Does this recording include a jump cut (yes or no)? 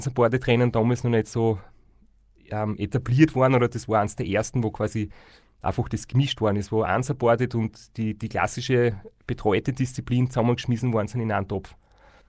no